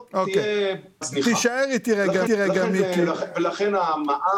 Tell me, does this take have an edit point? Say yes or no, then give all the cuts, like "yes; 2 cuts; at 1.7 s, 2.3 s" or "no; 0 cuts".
yes; 2 cuts; at 1.0 s, 2.3 s